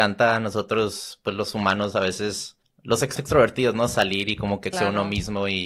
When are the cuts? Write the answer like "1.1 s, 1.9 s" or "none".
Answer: 2.6 s, 3.2 s, 4.7 s